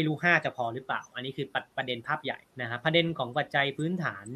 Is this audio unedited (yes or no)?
no